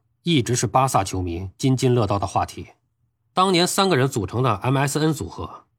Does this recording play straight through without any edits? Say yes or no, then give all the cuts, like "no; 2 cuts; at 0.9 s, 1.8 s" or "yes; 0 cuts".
yes; 0 cuts